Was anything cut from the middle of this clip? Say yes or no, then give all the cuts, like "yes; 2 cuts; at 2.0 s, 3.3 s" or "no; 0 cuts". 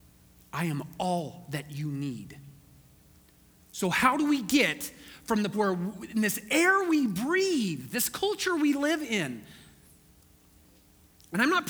yes; 1 cut; at 5.5 s